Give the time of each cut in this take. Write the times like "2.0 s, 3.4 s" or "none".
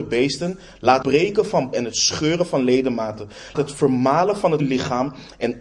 1.0 s, 1.7 s, 3.5 s, 4.6 s